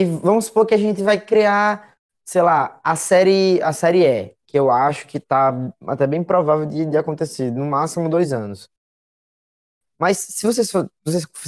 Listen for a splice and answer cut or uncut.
uncut